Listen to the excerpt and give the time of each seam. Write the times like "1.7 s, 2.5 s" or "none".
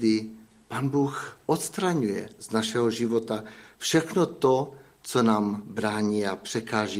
none

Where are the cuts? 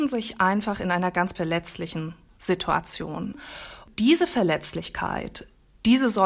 1.4 s

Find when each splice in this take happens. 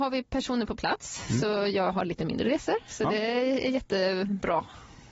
none

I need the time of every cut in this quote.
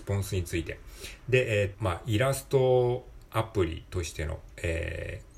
1.7 s

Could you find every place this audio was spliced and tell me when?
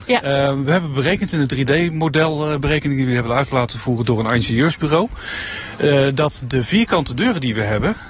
none

